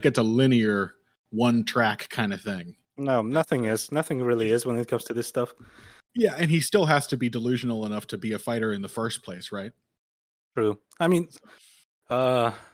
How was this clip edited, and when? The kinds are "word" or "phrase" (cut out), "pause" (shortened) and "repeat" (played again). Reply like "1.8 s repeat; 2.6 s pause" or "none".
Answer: none